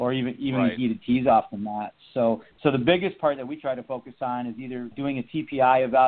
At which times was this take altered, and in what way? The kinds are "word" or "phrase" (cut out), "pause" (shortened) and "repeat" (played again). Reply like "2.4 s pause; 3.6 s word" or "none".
2.5 s pause; 4.9 s word